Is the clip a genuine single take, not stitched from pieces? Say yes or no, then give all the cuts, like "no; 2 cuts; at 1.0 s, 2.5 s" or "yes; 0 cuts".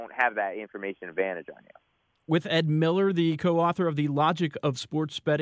yes; 0 cuts